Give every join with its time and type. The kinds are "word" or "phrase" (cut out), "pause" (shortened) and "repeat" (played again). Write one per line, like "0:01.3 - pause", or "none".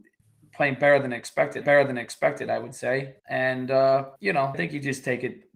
0:01.6 - repeat
0:03.2 - pause
0:04.2 - pause
0:04.5 - word